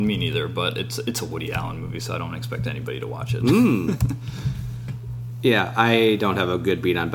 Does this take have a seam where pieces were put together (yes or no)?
no